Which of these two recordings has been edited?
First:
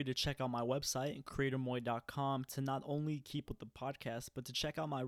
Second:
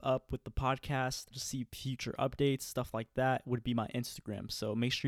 first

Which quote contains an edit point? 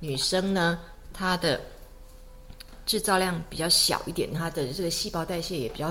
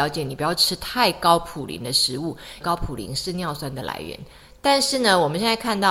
second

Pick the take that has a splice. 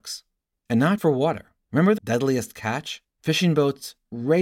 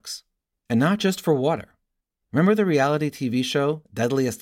first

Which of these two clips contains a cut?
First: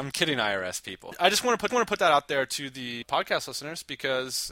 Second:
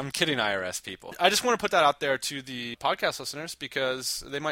first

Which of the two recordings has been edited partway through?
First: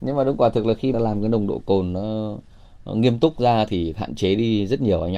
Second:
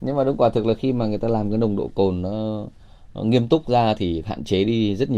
first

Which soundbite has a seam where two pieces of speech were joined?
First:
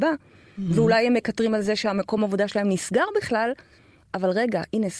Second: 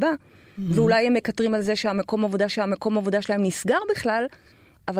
second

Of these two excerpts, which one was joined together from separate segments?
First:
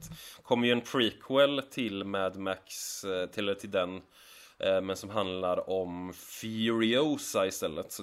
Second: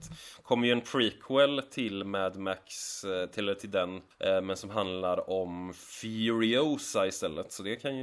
second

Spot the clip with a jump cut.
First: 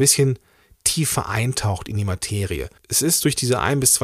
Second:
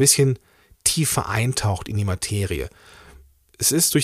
first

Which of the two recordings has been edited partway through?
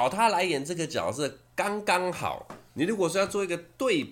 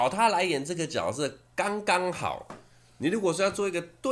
first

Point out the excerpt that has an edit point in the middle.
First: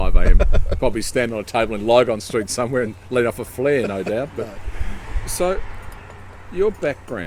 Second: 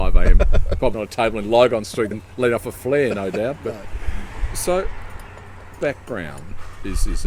second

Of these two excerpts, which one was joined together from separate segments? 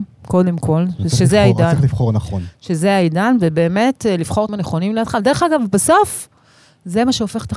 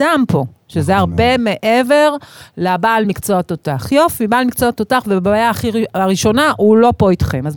first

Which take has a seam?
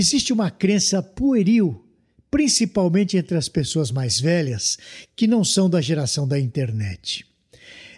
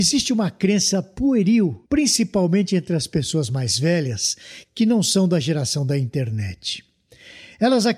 second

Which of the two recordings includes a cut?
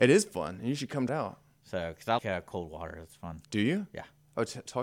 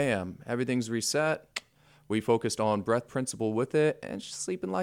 first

